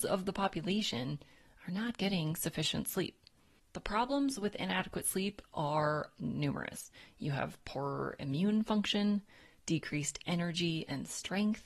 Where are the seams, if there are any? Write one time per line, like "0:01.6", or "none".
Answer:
none